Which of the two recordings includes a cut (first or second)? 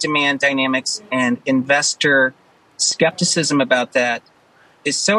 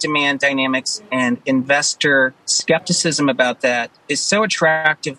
second